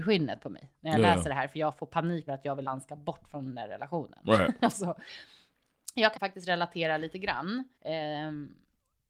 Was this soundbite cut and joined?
yes; 4 cuts; at 2.3 s, 2.6 s, 6.1 s, 7.7 s

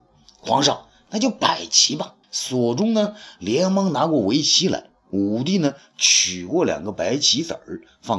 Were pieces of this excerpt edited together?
yes; 1 cut; at 2.2 s

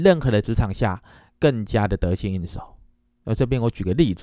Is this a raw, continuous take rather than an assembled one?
yes; 0 cuts

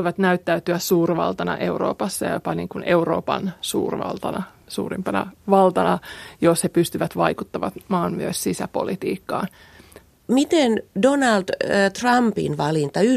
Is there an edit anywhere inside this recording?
no; 0 cuts

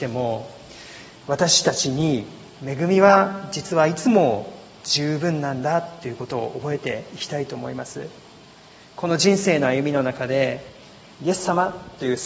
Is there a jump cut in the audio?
no; 0 cuts

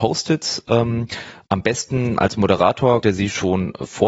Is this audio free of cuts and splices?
no; 1 cut; at 3.0 s

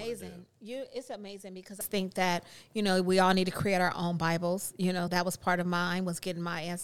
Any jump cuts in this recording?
yes; 2 cuts; at 1.8 s, 5.1 s

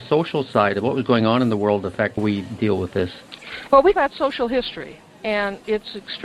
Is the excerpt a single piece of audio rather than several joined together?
no; 2 cuts; at 2.2 s, 3.9 s

